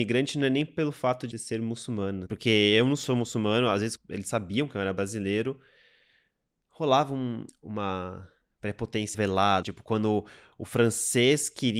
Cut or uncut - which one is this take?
cut